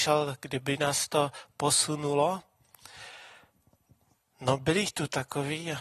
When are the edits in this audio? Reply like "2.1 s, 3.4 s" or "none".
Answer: none